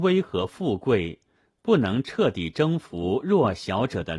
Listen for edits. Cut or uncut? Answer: uncut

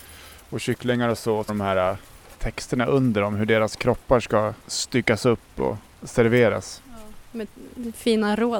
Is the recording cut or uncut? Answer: cut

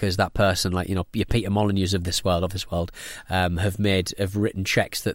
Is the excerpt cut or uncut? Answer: uncut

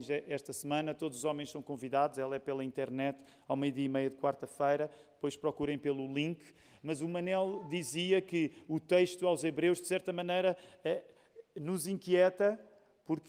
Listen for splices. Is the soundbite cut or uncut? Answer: uncut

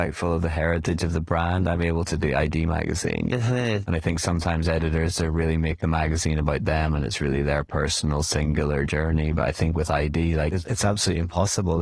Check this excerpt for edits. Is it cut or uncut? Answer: uncut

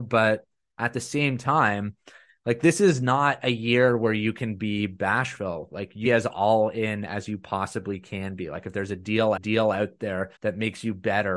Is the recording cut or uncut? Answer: cut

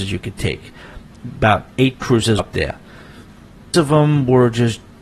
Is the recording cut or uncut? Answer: cut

